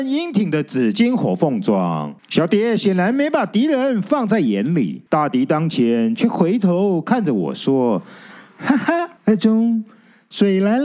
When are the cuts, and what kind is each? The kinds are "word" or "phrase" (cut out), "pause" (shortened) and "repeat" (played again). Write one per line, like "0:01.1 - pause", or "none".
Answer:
0:02.2 - pause
0:05.1 - pause
0:09.2 - pause